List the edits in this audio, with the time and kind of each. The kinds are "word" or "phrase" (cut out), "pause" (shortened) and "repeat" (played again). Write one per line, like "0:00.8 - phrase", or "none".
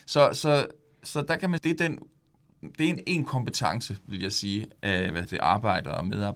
0:01.6 - word
0:03.0 - word
0:04.8 - word
0:05.2 - word